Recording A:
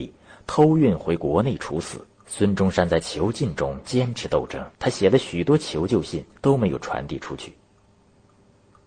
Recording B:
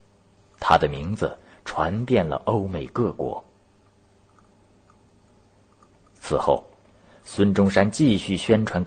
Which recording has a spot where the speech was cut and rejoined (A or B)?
A